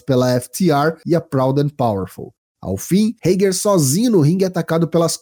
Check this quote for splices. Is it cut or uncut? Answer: uncut